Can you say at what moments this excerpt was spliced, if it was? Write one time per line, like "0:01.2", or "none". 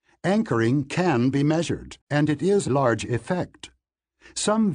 0:02.0
0:02.7